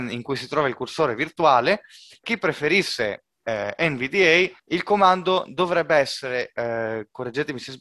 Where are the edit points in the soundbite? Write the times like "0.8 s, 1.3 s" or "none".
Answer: 2.2 s, 3.3 s, 4.6 s